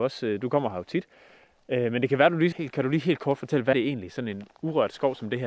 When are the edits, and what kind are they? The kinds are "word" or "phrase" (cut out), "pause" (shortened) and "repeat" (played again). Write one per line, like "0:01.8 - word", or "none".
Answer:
0:02.5 - word
0:03.7 - word